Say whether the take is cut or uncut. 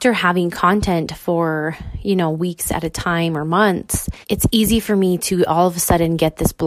cut